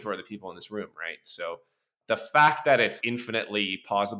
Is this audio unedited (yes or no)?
no